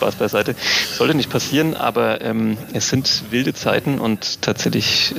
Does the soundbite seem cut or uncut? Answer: uncut